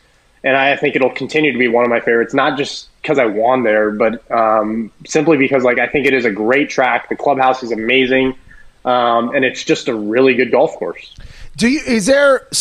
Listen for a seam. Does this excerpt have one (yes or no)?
no